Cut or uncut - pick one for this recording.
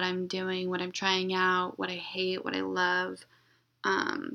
uncut